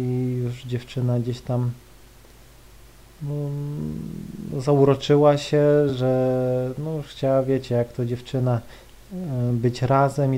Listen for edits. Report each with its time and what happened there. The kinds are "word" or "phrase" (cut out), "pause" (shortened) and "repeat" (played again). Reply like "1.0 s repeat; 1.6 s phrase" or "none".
none